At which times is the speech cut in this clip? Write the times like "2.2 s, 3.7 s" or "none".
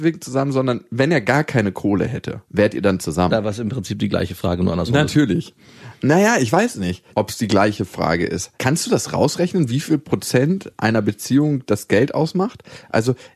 2.4 s, 7.1 s, 8.6 s